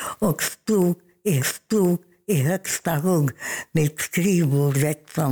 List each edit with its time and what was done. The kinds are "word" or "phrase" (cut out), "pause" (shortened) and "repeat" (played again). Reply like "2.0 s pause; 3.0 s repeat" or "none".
1.4 s repeat